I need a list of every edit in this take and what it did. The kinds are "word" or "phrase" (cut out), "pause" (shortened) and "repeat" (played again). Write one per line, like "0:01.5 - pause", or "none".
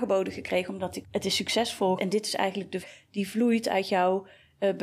0:01.0 - word
0:02.0 - word
0:02.8 - word